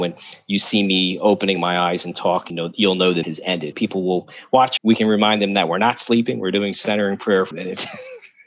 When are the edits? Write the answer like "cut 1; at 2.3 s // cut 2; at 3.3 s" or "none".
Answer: cut 1; at 2.5 s // cut 2; at 3.2 s // cut 3; at 3.7 s // cut 4; at 4.8 s // cut 5; at 7.5 s